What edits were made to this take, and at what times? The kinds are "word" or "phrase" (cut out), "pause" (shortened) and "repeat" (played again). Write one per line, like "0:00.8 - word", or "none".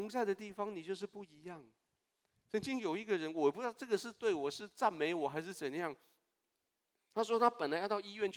none